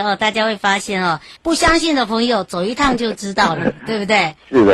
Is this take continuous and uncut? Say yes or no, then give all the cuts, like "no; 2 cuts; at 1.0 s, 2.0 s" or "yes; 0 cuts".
no; 1 cut; at 1.4 s